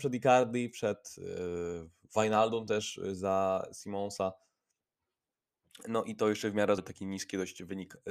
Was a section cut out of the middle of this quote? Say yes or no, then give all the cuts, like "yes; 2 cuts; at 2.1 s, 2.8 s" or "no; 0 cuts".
yes; 1 cut; at 6.8 s